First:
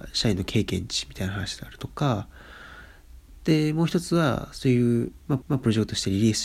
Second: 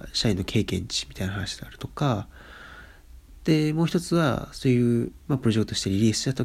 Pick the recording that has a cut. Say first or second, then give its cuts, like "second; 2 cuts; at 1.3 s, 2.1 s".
first; 1 cut; at 5.4 s